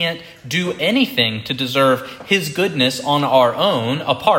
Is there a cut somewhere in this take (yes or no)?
no